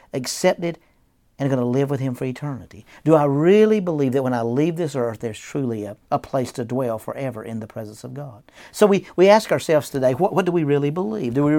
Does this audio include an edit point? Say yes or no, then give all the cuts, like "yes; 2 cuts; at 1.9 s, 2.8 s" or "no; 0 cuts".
no; 0 cuts